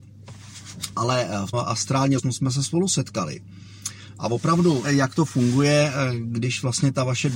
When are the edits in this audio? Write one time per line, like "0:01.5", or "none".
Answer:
0:01.5
0:02.2
0:04.8